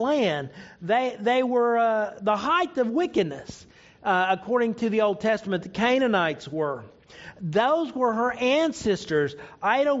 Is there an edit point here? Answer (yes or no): no